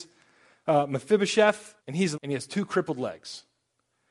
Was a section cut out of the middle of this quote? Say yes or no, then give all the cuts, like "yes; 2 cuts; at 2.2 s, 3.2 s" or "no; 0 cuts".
yes; 2 cuts; at 1.8 s, 2.1 s